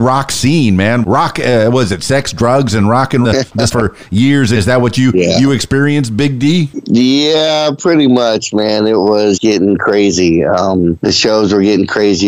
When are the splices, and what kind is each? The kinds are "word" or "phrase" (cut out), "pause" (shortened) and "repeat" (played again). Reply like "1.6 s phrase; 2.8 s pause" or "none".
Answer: 1.0 s word; 3.2 s phrase; 3.7 s word; 4.6 s phrase; 9.4 s word